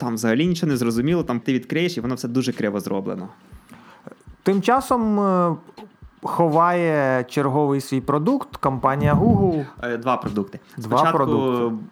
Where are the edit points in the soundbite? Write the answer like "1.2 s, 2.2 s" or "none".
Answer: 1.4 s